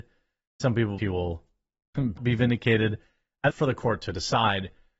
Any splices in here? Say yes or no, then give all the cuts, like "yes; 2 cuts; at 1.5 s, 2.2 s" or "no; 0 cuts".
yes; 3 cuts; at 1.0 s, 2.2 s, 3.5 s